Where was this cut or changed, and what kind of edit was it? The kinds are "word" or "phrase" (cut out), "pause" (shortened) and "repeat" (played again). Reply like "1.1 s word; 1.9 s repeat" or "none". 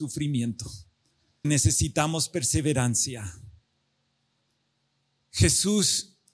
1.4 s word